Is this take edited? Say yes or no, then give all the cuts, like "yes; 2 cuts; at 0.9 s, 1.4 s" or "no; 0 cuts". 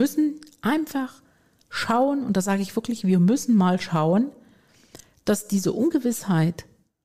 no; 0 cuts